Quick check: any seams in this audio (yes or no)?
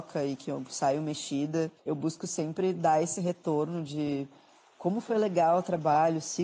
yes